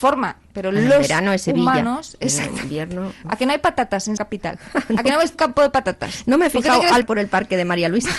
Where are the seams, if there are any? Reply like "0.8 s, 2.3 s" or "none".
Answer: 4.2 s, 5.3 s, 7.0 s